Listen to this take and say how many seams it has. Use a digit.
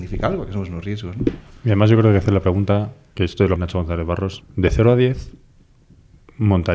2